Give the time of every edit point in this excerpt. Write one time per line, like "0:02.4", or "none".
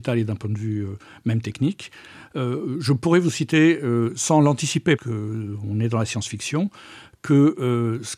0:05.0